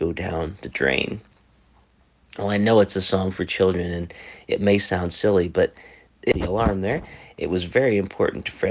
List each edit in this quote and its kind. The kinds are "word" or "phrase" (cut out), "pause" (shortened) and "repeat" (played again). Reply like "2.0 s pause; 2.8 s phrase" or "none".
none

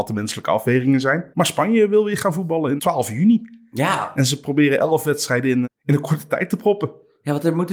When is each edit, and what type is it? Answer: 1.3 s pause; 2.8 s word; 5.6 s word

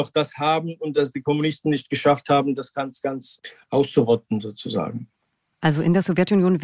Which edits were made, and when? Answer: none

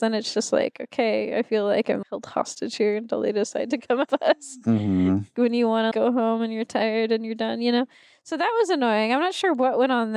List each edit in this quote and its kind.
2.0 s word; 4.1 s word; 5.9 s word

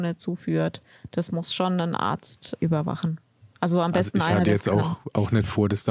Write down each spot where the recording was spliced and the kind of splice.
2.6 s word

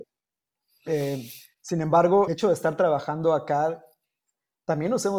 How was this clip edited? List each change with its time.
2.3 s word

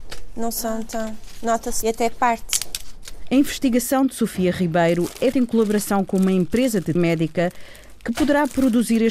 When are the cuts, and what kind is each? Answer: 1.8 s word; 5.3 s word; 7.0 s word

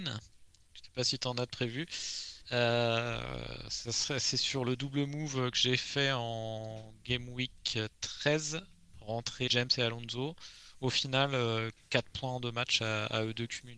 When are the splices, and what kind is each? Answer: 2.4 s pause; 9.5 s word

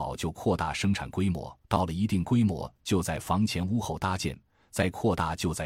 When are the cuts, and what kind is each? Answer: 1.6 s pause

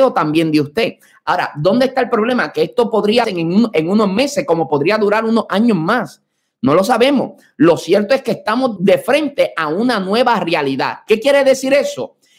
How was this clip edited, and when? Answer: 3.2 s word; 8.8 s word

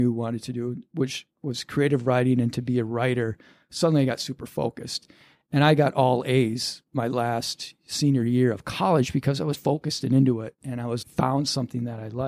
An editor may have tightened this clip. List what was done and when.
9.5 s word; 11.0 s word

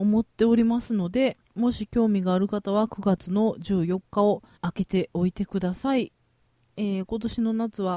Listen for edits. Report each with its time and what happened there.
1.4 s pause; 4.6 s pause

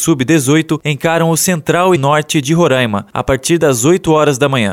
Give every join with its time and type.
2.0 s word

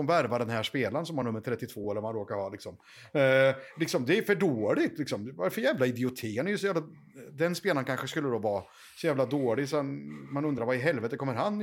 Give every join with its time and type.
none

